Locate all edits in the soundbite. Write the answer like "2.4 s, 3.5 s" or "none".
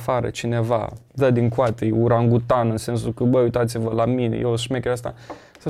1.1 s